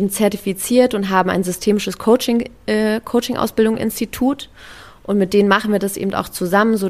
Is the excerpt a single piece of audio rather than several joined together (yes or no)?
yes